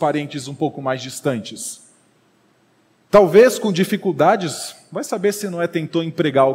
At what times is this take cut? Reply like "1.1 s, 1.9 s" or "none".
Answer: none